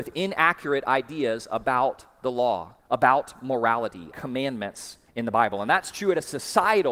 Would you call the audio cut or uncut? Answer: cut